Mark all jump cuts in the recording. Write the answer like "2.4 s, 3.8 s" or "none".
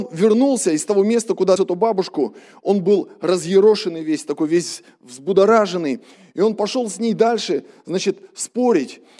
1.6 s